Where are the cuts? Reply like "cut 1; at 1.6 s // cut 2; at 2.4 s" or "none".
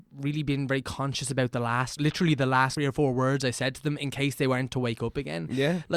cut 1; at 2.0 s // cut 2; at 2.8 s